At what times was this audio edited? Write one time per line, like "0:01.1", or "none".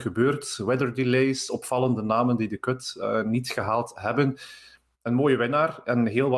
none

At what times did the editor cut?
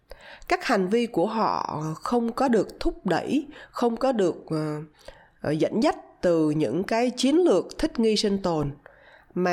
none

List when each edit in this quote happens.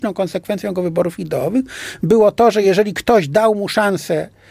none

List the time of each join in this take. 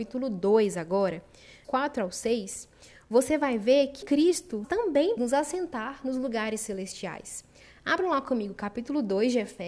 0:01.6
0:04.0
0:04.6
0:05.2

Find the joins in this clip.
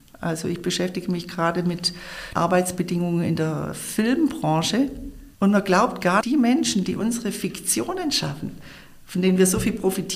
0:02.4
0:05.3
0:06.2

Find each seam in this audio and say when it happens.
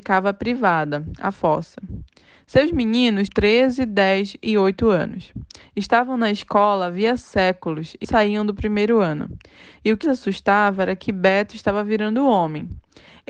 0:03.3
0:08.0
0:10.0

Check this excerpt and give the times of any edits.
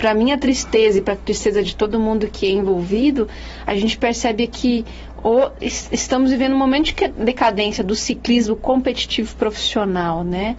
none

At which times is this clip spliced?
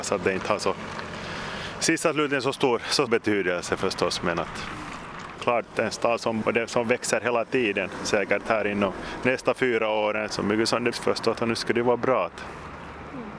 0:03.1
0:06.4
0:10.3
0:10.9
0:11.3

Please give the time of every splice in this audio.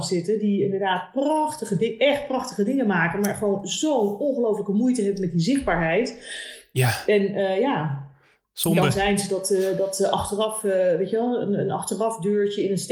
none

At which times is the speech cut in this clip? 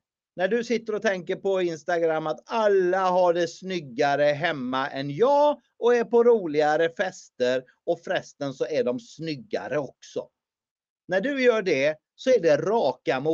none

